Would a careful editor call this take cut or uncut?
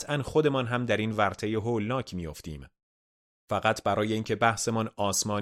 uncut